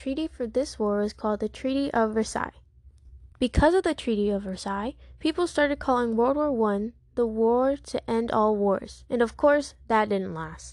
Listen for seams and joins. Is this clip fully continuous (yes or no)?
no